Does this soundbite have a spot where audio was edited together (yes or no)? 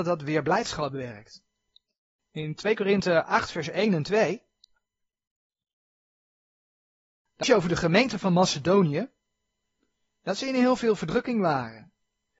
yes